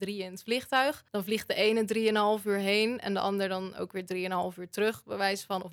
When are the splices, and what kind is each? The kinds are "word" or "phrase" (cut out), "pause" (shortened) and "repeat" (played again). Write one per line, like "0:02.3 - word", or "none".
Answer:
0:01.1 - pause

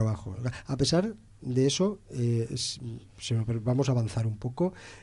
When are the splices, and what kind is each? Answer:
none

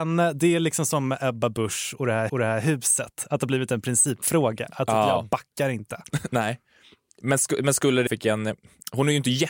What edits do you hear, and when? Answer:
0:02.3 - repeat
0:08.1 - phrase

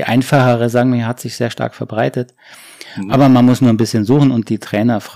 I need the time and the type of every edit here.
none

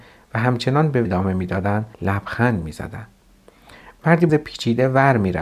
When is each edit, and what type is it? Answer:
0:01.0 - word
0:01.9 - pause
0:04.3 - word

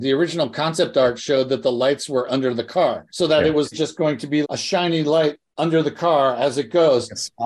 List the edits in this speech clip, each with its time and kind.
0:03.1 - pause
0:03.7 - word
0:04.4 - word

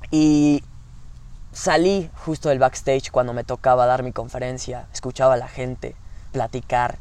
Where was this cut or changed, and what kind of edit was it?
none

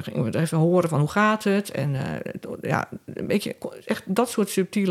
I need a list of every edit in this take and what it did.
none

